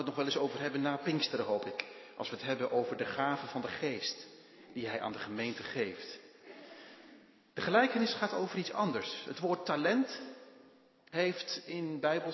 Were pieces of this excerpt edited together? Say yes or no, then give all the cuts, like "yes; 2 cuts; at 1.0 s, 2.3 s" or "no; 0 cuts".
no; 0 cuts